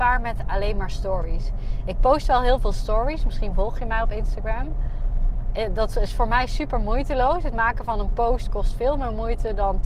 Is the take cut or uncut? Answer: uncut